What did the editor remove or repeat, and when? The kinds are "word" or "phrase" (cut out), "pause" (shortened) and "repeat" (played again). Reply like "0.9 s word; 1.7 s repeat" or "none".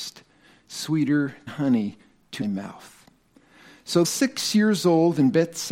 1.5 s word; 2.4 s word; 4.0 s word